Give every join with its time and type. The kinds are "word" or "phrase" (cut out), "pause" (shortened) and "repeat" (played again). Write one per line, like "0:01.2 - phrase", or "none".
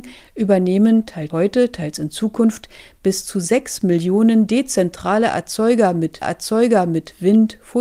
0:01.3 - word
0:06.2 - repeat